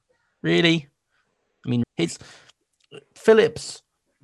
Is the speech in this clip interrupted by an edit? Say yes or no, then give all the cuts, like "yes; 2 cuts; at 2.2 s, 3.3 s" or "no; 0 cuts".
yes; 1 cut; at 1.8 s